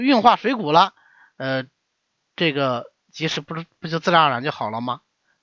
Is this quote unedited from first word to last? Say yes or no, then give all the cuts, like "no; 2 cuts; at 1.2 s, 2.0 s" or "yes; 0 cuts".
yes; 0 cuts